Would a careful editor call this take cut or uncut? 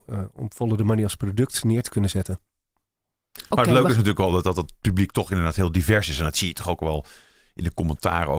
uncut